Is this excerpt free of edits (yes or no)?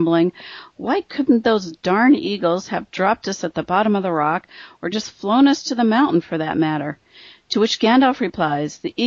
yes